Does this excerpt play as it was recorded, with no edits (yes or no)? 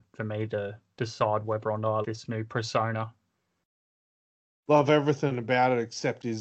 no